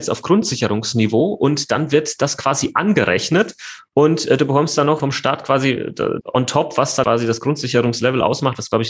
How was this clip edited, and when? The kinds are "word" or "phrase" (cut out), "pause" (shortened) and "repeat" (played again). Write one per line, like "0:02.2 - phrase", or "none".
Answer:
0:05.0 - word
0:06.2 - word
0:07.0 - word